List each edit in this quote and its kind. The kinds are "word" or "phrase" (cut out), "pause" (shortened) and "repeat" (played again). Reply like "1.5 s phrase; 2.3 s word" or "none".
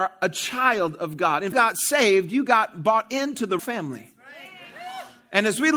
1.5 s phrase; 3.6 s word